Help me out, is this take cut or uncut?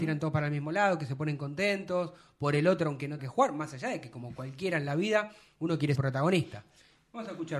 cut